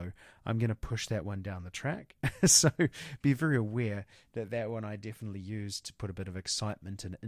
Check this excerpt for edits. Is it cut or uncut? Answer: uncut